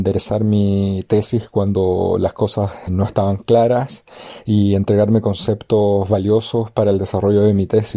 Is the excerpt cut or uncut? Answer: cut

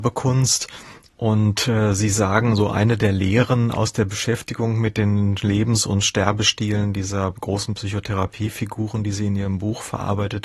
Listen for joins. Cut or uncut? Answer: uncut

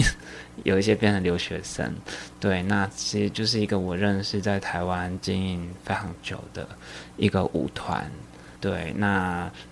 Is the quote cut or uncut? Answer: cut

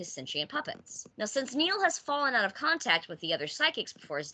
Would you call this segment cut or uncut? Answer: uncut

